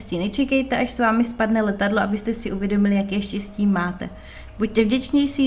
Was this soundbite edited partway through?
no; 0 cuts

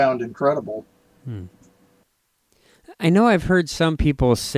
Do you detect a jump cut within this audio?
no; 0 cuts

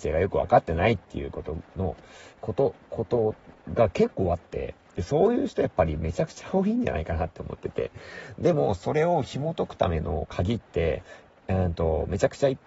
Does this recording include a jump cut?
yes; 1 cut; at 2.3 s

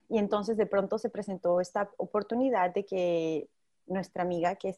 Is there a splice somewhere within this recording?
no; 0 cuts

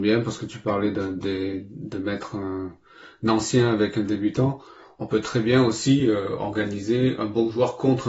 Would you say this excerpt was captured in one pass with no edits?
yes; 0 cuts

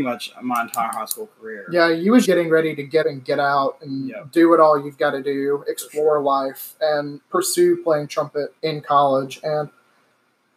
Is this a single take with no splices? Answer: no; 4 cuts; at 2.2 s, 3.0 s, 7.2 s, 8.6 s

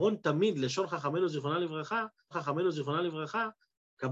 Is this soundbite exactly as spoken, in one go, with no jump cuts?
no; 1 cut; at 2.3 s

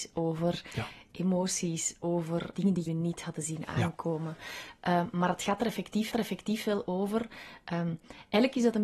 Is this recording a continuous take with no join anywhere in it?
no; 3 cuts; at 2.6 s, 2.9 s, 6.1 s

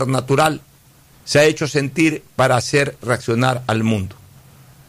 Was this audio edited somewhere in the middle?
no; 0 cuts

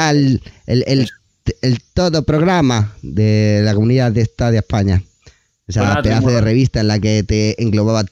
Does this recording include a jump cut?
no; 0 cuts

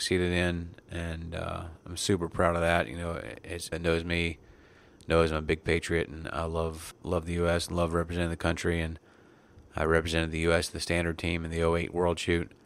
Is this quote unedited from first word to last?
no; 2 cuts; at 3.7 s, 6.9 s

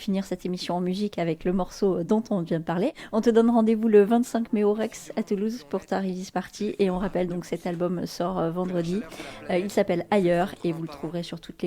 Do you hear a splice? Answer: no; 0 cuts

